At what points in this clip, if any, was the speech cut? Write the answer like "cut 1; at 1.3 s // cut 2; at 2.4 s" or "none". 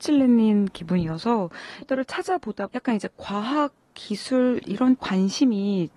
cut 1; at 1.8 s // cut 2; at 2.7 s // cut 3; at 5.0 s